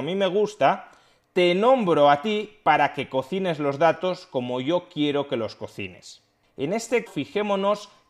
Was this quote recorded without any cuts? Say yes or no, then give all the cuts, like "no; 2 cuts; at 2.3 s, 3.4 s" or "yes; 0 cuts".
no; 1 cut; at 7.1 s